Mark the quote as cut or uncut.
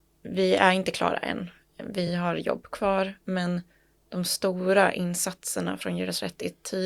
uncut